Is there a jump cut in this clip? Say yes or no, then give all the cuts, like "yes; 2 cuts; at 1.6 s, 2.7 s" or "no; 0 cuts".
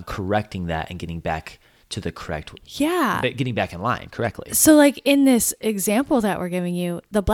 no; 0 cuts